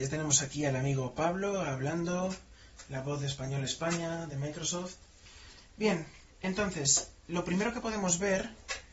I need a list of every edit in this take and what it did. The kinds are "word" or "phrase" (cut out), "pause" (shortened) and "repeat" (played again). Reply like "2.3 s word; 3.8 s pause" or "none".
6.3 s pause